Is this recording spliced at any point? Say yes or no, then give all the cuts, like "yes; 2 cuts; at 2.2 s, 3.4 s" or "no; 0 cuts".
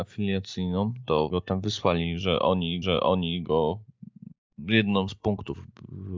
yes; 3 cuts; at 1.3 s, 2.8 s, 5.1 s